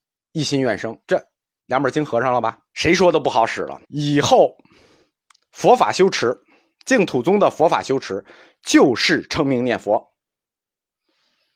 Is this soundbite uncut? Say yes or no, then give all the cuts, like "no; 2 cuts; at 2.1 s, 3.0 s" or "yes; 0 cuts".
no; 3 cuts; at 1.0 s, 2.7 s, 3.8 s